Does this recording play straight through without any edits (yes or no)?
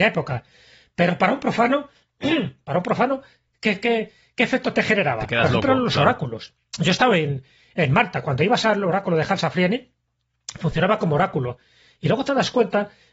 no